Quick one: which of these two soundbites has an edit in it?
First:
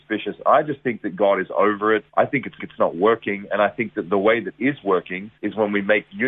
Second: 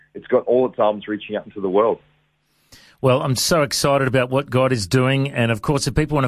first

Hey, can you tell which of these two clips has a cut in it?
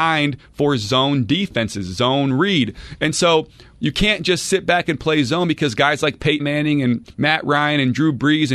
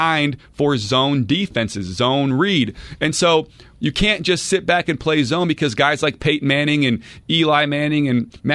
first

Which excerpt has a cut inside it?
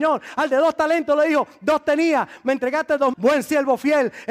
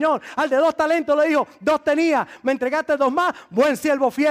first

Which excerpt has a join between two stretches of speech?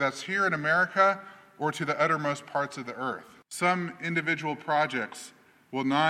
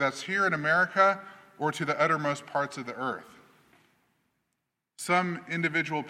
first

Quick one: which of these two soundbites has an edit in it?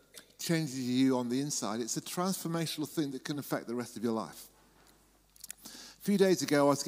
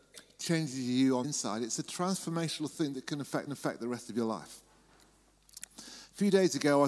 second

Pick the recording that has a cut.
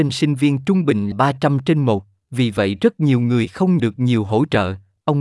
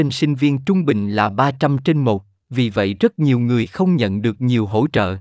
first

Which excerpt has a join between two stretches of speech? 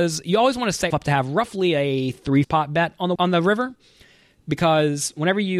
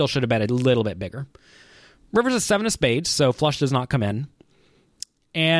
first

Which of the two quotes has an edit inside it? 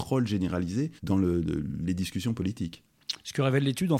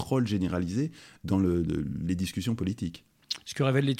first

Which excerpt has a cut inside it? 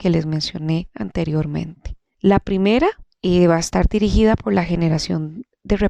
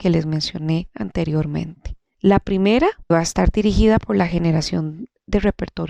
second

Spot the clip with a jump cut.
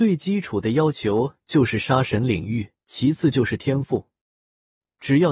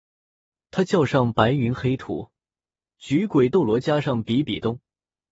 first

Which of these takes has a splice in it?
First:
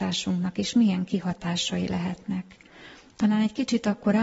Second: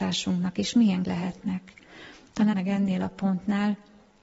second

